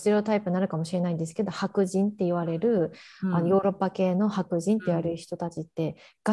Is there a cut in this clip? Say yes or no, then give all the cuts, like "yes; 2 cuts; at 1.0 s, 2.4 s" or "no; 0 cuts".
no; 0 cuts